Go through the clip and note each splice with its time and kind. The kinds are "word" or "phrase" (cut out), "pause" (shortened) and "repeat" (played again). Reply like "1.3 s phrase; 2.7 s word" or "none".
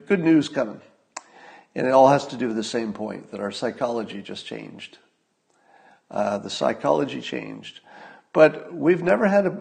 none